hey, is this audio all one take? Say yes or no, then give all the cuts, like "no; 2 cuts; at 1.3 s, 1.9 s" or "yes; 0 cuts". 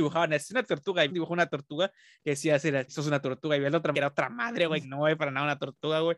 no; 5 cuts; at 1.1 s, 2.9 s, 3.9 s, 4.8 s, 5.2 s